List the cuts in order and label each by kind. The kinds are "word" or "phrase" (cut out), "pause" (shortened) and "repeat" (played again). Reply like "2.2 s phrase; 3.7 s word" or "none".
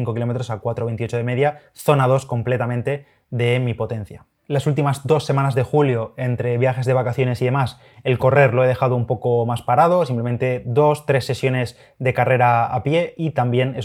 none